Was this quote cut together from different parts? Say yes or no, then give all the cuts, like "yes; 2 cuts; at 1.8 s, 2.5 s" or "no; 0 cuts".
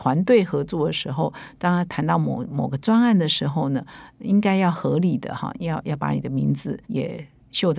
yes; 1 cut; at 6.8 s